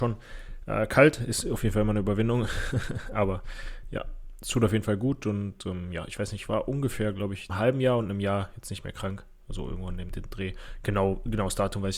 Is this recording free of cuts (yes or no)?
no